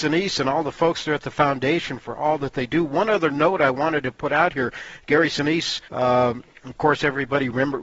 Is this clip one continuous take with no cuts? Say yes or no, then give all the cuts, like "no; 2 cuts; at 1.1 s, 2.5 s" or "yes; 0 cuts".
no; 1 cut; at 5.9 s